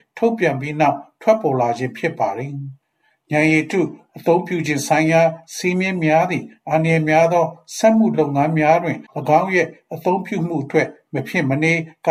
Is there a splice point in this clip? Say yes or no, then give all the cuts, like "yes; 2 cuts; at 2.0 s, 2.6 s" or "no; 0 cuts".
yes; 2 cuts; at 2.8 s, 9.1 s